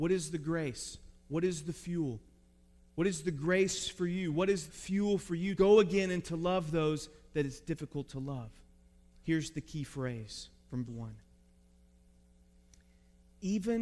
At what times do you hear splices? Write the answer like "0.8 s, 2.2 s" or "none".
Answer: 4.7 s, 5.6 s, 10.9 s